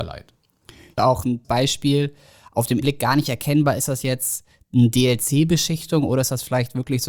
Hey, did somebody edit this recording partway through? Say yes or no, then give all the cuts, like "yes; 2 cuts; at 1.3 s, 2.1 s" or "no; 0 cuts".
yes; 3 cuts; at 1.0 s, 1.4 s, 2.8 s